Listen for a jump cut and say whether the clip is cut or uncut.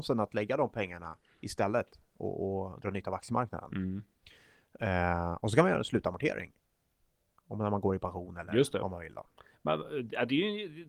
uncut